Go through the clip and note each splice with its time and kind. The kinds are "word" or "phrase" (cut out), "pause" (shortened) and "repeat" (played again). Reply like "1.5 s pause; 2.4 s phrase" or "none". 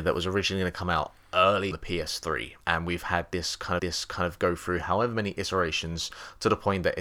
1.7 s word; 2.6 s pause; 3.8 s repeat